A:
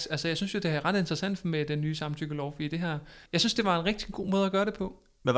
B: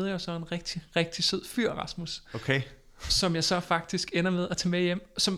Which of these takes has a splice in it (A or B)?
A